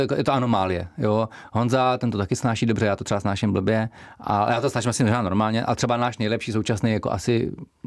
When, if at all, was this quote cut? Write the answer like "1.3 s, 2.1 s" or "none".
none